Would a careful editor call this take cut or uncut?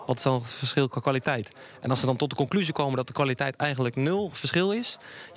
uncut